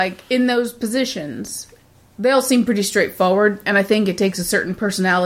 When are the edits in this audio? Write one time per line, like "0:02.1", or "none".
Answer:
none